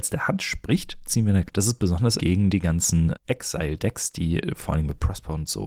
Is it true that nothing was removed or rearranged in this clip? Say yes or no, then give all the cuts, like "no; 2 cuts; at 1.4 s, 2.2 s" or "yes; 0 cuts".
no; 3 cuts; at 1.5 s, 2.2 s, 3.1 s